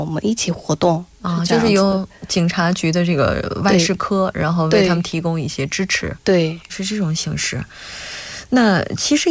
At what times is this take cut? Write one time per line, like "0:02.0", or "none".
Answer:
0:06.7